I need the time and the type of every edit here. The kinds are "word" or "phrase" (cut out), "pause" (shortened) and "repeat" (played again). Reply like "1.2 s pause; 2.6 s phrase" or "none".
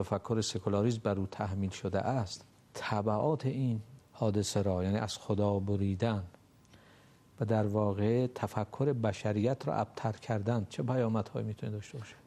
2.5 s pause; 4.0 s pause